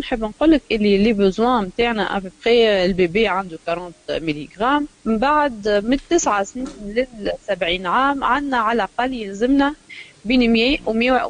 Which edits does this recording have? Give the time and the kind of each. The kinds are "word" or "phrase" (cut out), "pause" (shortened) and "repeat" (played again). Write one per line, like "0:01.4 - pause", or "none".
0:04.9 - pause